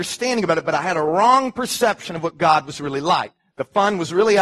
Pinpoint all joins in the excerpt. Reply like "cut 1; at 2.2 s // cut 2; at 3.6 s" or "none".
none